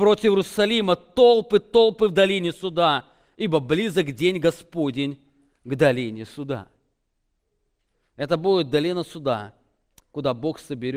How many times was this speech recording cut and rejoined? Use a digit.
0